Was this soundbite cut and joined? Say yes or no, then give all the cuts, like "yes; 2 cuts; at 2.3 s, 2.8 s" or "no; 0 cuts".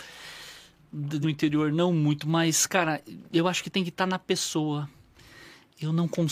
yes; 2 cuts; at 1.2 s, 3.3 s